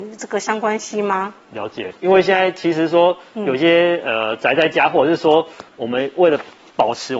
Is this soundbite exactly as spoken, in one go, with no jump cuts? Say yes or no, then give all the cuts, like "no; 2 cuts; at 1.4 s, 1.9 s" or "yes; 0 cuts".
no; 1 cut; at 2.0 s